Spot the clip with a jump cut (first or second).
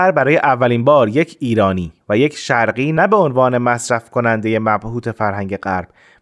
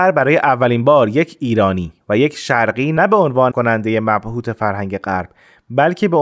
second